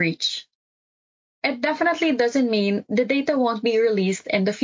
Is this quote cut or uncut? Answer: uncut